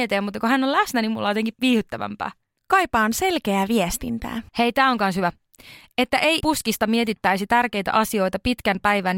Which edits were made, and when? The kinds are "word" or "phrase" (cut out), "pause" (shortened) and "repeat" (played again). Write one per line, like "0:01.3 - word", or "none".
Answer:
0:01.5 - word
0:02.6 - pause
0:04.5 - pause
0:06.4 - word